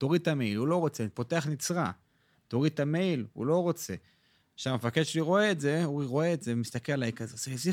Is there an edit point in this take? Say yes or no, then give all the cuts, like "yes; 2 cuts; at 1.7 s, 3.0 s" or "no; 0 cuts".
no; 0 cuts